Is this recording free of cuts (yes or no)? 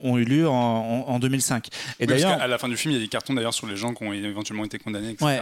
yes